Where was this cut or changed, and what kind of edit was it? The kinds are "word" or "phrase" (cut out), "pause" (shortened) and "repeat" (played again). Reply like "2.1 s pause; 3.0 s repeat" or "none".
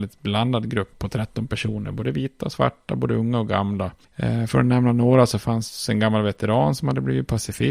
0.9 s word